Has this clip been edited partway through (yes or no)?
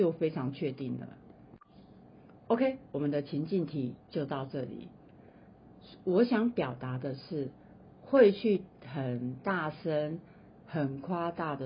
no